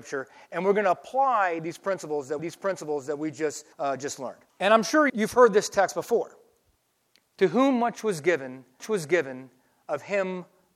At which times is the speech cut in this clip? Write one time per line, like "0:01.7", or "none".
0:02.4
0:03.7
0:04.5
0:05.1
0:06.8
0:08.8